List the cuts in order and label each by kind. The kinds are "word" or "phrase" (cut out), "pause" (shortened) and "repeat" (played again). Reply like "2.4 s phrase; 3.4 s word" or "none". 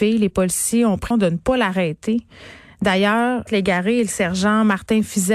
1.1 s phrase; 3.5 s phrase